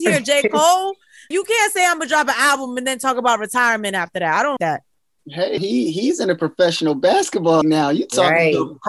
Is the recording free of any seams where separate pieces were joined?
no; 4 cuts; at 1.3 s, 4.6 s, 5.6 s, 7.6 s

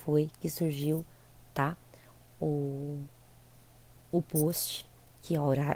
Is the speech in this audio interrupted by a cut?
no; 0 cuts

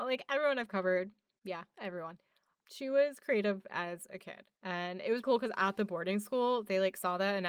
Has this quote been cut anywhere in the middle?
yes; 1 cut; at 5.2 s

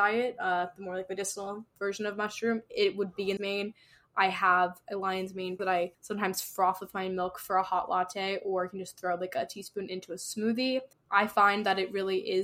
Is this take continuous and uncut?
no; 4 cuts; at 3.4 s, 5.6 s, 5.9 s, 10.9 s

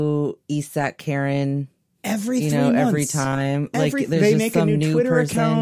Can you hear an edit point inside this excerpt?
no; 0 cuts

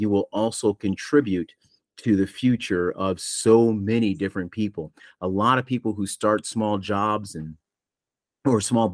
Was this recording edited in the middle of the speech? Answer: no; 0 cuts

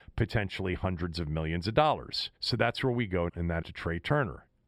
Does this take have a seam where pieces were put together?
yes; 3 cuts; at 2.4 s, 3.3 s, 3.6 s

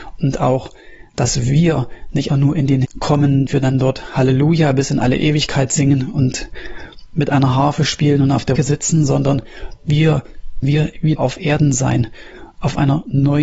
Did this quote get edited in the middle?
yes; 6 cuts; at 2.3 s, 2.8 s, 3.5 s, 8.6 s, 10.6 s, 11.2 s

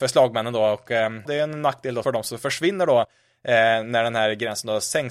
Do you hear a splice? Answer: yes; 2 cuts; at 1.3 s, 2.0 s

